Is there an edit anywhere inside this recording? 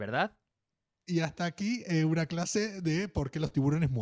no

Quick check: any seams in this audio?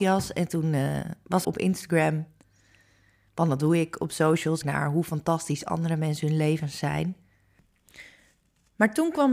yes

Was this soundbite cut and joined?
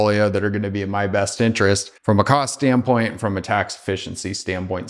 yes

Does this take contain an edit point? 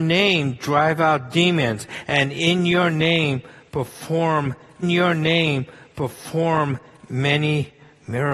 yes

